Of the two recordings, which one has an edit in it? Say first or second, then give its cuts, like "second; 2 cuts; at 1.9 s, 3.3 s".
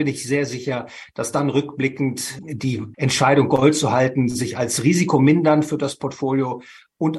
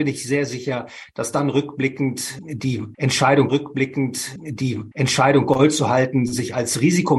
second; 1 cut; at 3.5 s